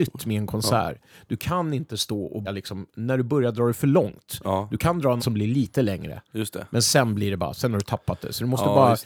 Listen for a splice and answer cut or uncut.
cut